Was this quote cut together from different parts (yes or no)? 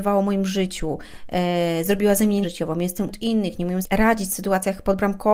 yes